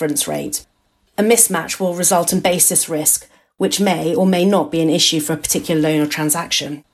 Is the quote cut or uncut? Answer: uncut